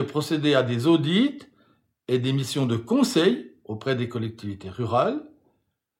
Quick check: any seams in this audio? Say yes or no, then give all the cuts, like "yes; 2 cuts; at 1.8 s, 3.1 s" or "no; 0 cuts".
no; 0 cuts